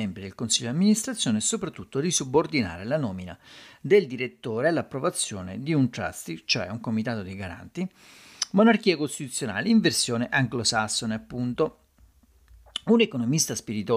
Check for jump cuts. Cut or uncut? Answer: uncut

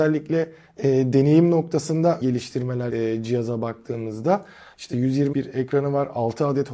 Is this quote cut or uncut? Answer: cut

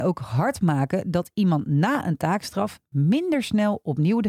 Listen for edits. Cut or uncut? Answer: uncut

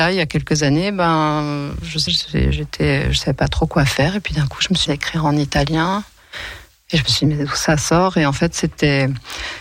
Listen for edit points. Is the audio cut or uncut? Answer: cut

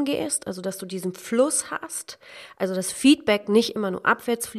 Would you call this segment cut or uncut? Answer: uncut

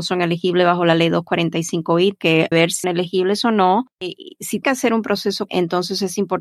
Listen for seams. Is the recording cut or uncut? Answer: cut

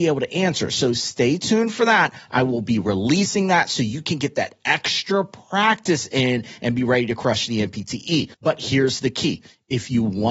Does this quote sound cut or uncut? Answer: cut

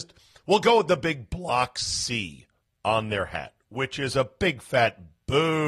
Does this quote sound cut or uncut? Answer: cut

